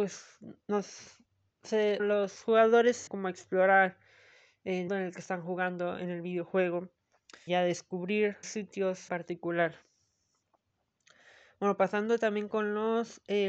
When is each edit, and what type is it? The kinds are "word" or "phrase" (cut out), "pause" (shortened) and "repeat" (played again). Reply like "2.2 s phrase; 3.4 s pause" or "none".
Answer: 2.0 s word; 3.1 s word; 4.9 s word; 7.5 s word; 8.4 s word; 9.1 s word

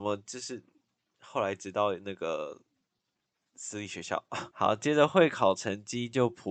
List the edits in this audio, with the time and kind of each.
4.5 s pause

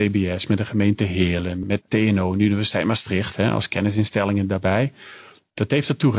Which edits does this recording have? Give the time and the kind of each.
1.8 s word

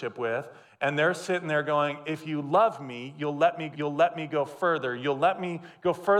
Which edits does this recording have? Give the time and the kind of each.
3.7 s repeat

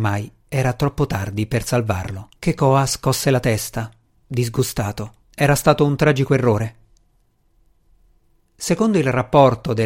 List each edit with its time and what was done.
2.4 s pause; 5.2 s pause

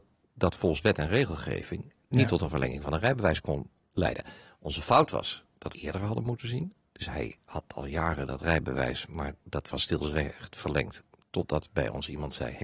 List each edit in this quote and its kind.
5.7 s phrase

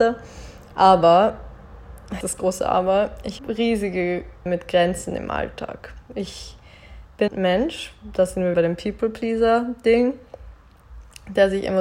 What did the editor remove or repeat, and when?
2.2 s word; 3.4 s word; 4.5 s word; 7.3 s word; 8.5 s word

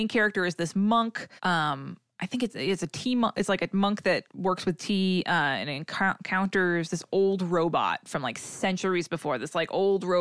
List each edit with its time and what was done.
1.4 s pause; 4.3 s pause

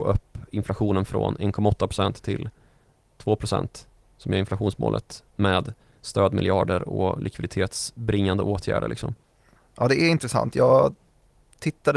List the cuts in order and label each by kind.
none

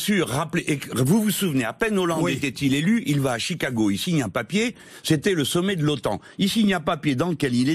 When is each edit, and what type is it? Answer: none

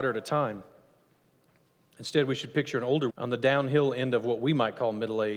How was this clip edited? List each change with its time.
3.1 s word

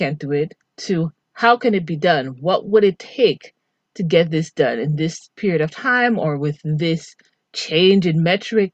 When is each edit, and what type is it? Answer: none

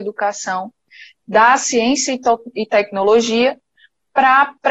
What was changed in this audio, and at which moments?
none

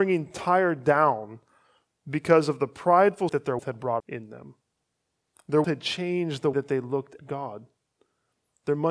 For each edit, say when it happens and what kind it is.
3.3 s word; 3.6 s word; 4.0 s word; 5.6 s word; 6.5 s word; 7.2 s word

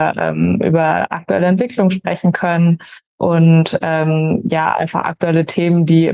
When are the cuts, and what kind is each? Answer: none

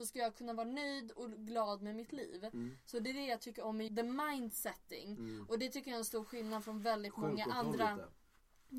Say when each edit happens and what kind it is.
3.9 s word

